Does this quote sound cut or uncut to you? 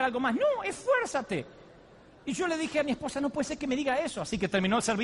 uncut